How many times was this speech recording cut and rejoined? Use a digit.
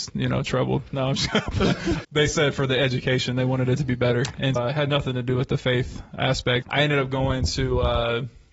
3